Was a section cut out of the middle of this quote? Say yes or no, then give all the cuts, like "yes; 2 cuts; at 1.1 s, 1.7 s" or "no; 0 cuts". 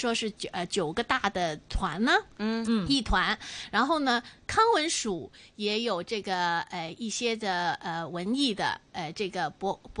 no; 0 cuts